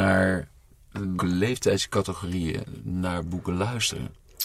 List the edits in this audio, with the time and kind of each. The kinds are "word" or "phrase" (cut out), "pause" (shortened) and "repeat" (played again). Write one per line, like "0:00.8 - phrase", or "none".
0:01.2 - word